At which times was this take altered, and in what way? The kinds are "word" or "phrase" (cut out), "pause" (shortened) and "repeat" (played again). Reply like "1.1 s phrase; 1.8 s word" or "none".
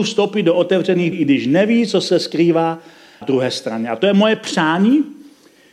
1.1 s word; 3.2 s word